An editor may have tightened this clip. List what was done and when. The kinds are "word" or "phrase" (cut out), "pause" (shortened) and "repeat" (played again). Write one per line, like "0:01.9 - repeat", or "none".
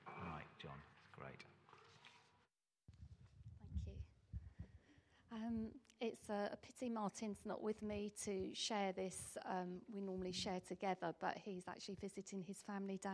none